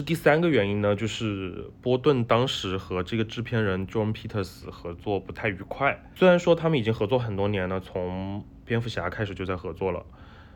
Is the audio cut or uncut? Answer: uncut